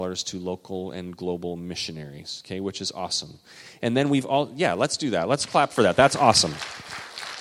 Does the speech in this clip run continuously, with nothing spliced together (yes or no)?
yes